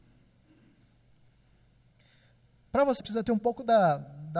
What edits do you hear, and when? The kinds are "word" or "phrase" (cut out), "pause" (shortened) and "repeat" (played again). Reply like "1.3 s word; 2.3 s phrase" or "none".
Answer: 3.0 s phrase